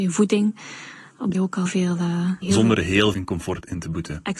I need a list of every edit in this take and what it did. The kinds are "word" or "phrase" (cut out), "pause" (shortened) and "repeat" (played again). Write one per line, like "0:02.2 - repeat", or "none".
0:01.3 - phrase
0:01.7 - word
0:02.4 - word
0:03.1 - word